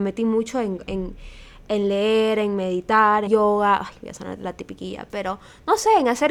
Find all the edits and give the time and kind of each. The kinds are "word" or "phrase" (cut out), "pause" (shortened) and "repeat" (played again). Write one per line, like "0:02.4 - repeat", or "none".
0:03.3 - word